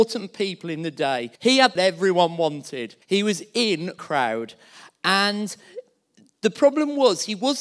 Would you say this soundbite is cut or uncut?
cut